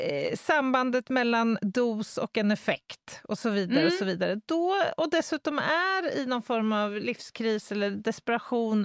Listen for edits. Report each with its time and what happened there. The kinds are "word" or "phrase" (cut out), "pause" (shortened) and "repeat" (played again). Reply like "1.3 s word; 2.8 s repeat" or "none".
1.6 s word